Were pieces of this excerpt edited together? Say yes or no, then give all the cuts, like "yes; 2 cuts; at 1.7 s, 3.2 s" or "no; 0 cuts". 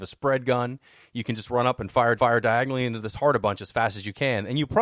yes; 1 cut; at 2.2 s